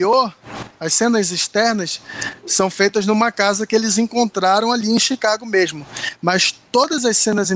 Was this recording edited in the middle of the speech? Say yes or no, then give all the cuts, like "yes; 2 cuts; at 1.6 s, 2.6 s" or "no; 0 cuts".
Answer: no; 0 cuts